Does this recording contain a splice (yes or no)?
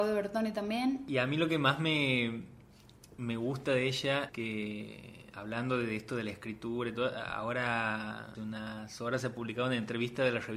yes